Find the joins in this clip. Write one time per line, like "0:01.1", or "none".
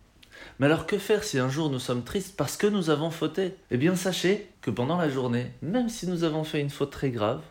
0:03.6
0:04.5